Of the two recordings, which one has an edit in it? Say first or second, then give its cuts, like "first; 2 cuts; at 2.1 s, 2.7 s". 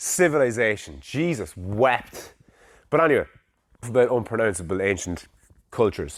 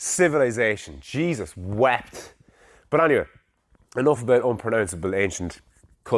first; 1 cut; at 3.8 s